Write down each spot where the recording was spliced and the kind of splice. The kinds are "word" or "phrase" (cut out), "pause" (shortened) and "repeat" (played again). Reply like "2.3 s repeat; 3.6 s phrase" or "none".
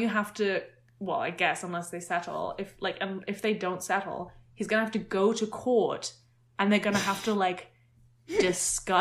none